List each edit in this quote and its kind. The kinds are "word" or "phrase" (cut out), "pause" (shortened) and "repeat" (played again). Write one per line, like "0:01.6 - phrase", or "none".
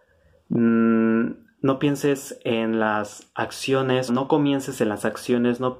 0:04.1 - word